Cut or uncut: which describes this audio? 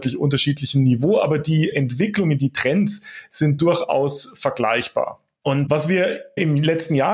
uncut